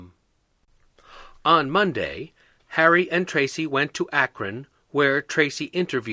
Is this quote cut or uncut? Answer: uncut